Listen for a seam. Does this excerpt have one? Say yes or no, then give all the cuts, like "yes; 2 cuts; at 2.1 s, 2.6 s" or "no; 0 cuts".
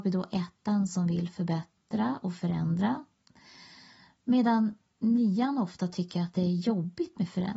no; 0 cuts